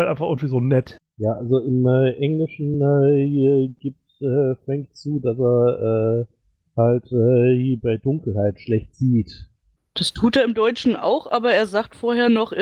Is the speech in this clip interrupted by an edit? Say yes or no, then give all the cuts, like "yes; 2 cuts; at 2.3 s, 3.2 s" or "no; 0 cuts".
no; 0 cuts